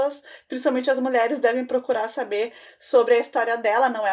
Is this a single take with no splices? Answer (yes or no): yes